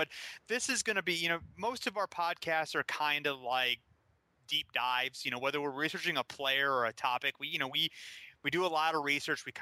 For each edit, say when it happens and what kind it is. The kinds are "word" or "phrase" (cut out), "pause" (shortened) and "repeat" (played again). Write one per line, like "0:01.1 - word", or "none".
none

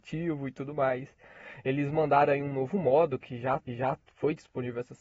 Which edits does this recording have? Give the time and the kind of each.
0:03.7 - repeat

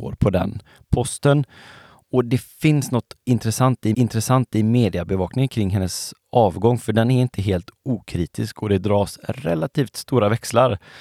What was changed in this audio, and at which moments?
0:03.9 - repeat

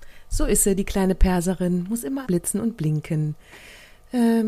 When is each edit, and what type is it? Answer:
0:02.2 - word

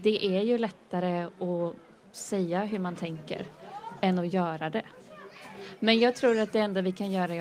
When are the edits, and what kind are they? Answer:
none

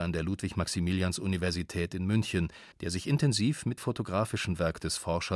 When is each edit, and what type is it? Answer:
0:02.7 - pause
0:03.8 - word

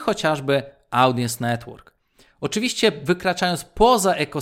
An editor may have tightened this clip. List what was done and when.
none

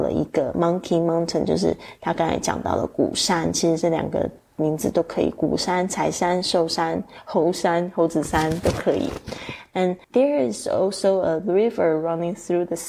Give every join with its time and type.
0:10.0 - pause

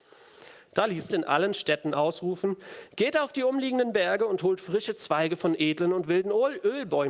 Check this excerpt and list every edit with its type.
0:01.1 - phrase

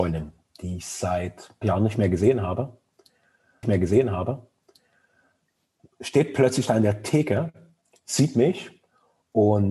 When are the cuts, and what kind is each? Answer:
0:01.6 - word
0:03.6 - repeat

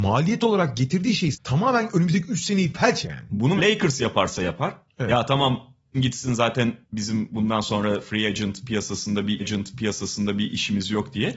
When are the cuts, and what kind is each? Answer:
0:01.3 - word
0:03.0 - word
0:03.6 - word
0:05.9 - word
0:06.8 - pause
0:09.4 - repeat

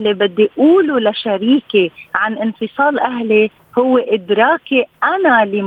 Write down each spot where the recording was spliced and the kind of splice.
none

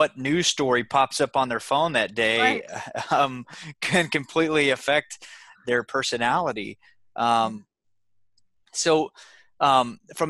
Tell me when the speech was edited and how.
none

